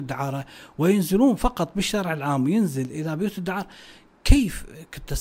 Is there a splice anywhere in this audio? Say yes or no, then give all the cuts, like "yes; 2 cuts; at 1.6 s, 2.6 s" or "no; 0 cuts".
no; 0 cuts